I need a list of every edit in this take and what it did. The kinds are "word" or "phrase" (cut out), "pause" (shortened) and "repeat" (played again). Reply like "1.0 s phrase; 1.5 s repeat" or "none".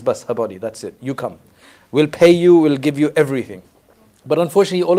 none